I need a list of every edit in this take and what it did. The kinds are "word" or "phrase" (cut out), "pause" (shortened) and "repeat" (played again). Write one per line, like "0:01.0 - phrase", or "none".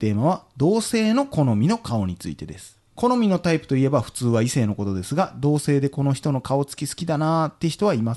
0:02.9 - pause